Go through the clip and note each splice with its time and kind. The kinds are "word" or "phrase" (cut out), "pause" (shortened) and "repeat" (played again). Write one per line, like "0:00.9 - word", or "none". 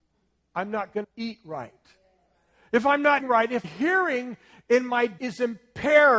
0:01.0 - word
0:03.2 - word
0:03.6 - word
0:05.2 - word